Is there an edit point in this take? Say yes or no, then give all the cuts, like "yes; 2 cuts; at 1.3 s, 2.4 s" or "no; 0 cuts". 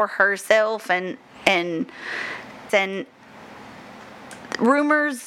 yes; 1 cut; at 2.7 s